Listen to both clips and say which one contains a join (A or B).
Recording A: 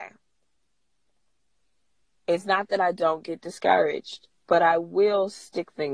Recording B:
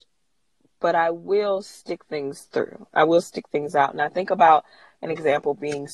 A